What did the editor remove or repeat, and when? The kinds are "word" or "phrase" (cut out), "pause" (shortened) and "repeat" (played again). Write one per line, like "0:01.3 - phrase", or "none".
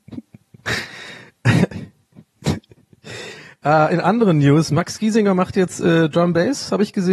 none